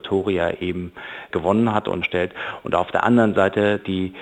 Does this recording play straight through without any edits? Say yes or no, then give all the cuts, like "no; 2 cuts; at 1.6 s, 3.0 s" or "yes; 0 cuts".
no; 1 cut; at 2.0 s